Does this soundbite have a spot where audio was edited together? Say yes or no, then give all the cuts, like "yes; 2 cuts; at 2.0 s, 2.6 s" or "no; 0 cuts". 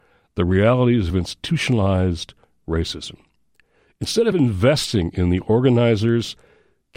no; 0 cuts